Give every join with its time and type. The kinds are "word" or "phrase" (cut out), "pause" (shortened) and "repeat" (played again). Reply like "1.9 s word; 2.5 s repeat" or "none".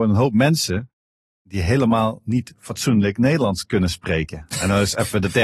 none